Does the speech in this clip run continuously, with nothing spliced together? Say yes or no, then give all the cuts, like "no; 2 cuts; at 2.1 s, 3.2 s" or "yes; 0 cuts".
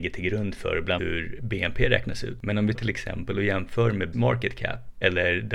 no; 3 cuts; at 1.0 s, 2.7 s, 4.1 s